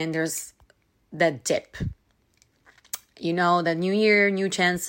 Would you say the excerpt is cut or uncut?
uncut